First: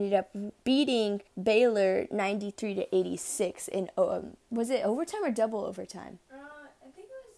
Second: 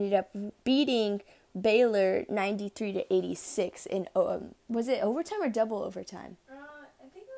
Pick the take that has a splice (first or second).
first